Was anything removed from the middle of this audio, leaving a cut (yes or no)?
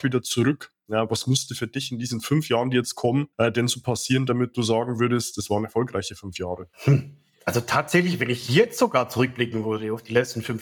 yes